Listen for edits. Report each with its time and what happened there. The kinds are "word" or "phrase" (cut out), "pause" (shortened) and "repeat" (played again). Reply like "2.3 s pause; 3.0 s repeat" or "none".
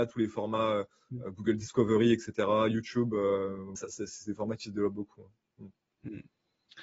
3.8 s word